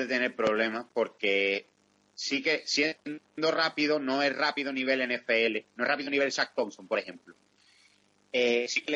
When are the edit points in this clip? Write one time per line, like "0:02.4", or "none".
none